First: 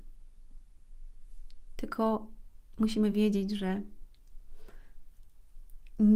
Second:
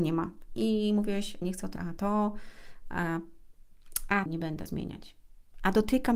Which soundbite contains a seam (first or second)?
second